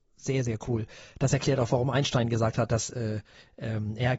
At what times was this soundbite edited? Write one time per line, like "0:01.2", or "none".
none